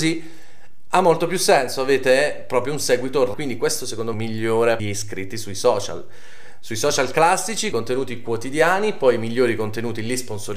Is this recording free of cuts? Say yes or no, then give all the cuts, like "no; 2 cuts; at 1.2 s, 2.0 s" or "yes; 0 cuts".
no; 4 cuts; at 3.3 s, 4.1 s, 4.8 s, 7.7 s